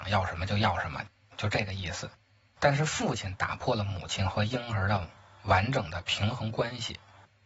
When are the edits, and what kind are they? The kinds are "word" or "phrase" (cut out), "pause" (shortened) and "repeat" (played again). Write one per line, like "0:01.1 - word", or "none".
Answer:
none